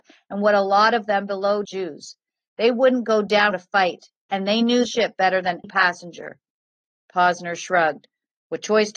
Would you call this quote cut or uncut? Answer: cut